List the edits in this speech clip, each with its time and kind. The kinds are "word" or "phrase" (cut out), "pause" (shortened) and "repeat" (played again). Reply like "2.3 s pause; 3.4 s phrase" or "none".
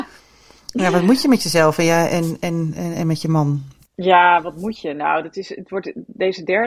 3.9 s pause